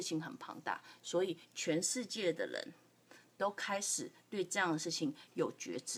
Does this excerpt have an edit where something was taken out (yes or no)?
no